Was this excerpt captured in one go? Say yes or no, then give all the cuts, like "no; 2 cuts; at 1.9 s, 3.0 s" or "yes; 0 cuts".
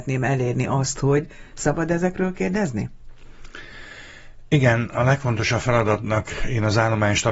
yes; 0 cuts